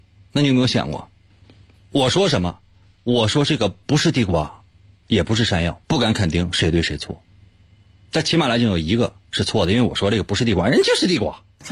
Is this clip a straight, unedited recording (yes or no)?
no